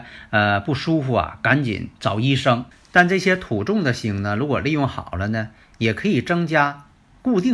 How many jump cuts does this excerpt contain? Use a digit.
2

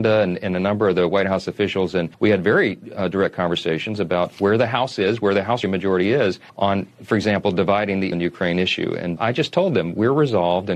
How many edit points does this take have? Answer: 5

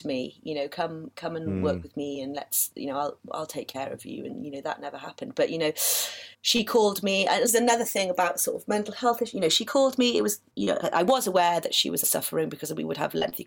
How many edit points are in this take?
5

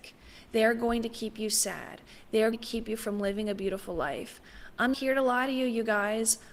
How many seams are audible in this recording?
2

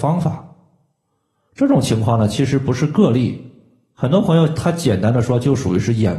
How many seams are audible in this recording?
0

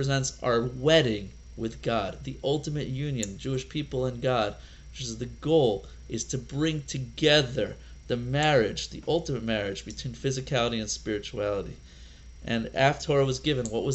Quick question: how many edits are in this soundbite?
1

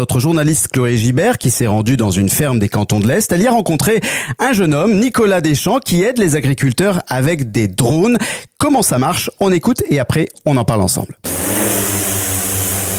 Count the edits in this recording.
0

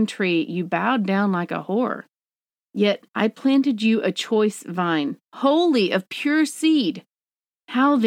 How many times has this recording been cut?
1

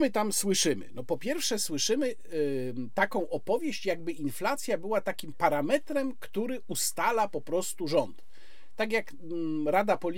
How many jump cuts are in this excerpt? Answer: 0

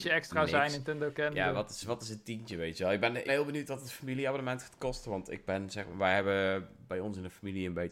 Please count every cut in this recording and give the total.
2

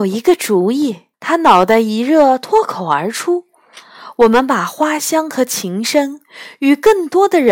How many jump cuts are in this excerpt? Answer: 1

